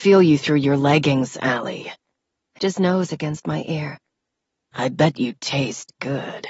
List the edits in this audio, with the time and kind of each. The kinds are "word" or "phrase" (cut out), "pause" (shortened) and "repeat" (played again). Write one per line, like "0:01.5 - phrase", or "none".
0:02.6 - word